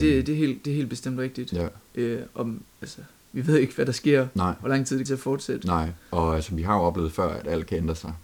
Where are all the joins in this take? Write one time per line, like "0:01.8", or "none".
0:02.7
0:05.1
0:06.0